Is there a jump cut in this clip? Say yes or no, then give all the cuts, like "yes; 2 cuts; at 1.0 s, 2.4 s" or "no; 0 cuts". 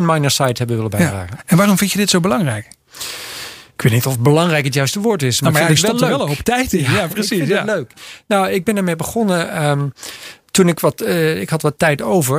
no; 0 cuts